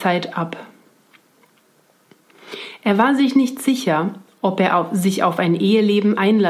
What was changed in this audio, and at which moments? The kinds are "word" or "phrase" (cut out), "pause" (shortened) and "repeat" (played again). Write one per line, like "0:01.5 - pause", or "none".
none

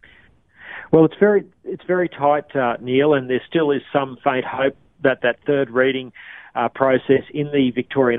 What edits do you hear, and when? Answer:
none

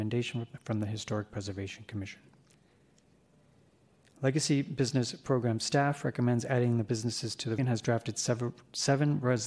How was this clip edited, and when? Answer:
0:07.6 - word

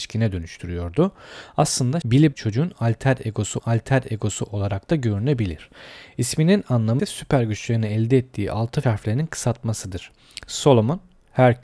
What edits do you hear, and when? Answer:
0:02.0 - word
0:02.3 - phrase
0:03.6 - repeat
0:07.0 - word
0:08.8 - phrase

